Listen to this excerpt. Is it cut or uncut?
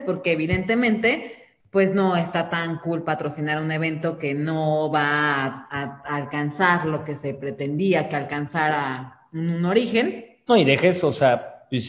uncut